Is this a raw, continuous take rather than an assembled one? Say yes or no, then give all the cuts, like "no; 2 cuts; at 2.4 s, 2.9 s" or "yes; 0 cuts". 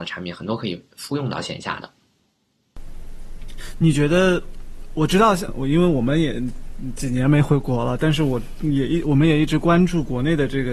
no; 1 cut; at 5.5 s